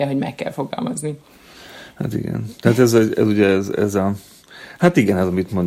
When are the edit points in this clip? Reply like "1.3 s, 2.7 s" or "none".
none